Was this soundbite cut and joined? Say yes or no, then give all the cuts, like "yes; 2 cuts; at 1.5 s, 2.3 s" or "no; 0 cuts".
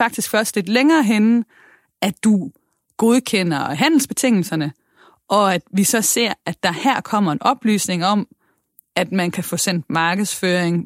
no; 0 cuts